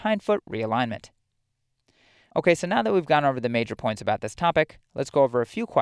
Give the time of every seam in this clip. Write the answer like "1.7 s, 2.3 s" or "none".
none